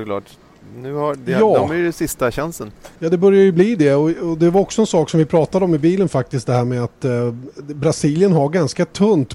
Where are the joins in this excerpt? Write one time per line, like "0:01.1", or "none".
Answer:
0:03.0

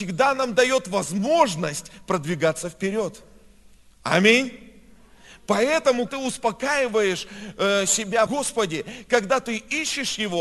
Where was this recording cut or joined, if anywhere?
0:06.1
0:08.3

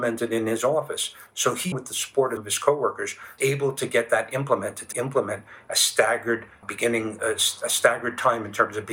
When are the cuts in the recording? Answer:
0:01.7
0:02.4
0:03.4
0:04.9
0:06.6
0:07.2

